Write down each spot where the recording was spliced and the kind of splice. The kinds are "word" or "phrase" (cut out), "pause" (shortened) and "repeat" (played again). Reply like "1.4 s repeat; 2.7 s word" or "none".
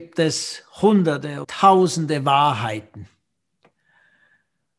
1.4 s word